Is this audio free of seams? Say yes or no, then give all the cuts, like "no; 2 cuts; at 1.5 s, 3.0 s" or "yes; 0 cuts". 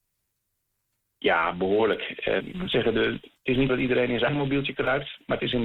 no; 3 cuts; at 2.4 s, 3.7 s, 4.3 s